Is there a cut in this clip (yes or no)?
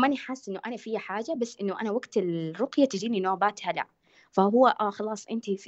no